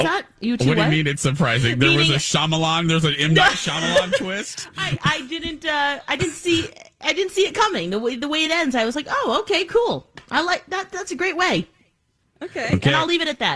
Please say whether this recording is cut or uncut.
uncut